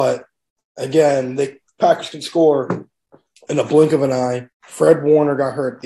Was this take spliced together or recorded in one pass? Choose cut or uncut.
cut